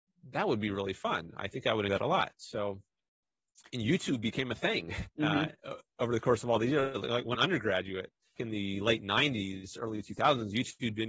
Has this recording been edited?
yes; 4 cuts; at 1.9 s, 5.1 s, 7.3 s, 8.4 s

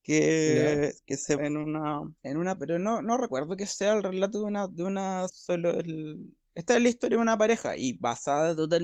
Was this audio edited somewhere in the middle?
yes; 4 cuts; at 1.4 s, 2.2 s, 2.6 s, 5.3 s

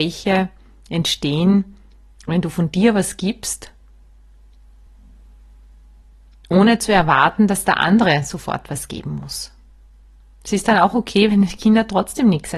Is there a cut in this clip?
no; 0 cuts

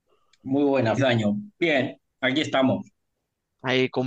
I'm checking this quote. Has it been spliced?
yes; 2 cuts; at 1.0 s, 2.1 s

